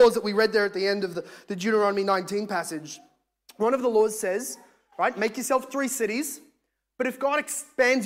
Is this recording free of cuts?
yes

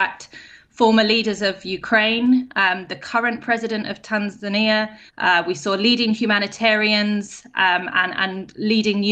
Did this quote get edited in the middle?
yes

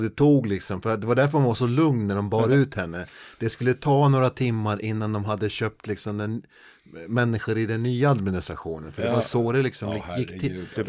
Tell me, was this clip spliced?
no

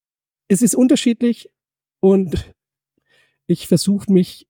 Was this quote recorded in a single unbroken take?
yes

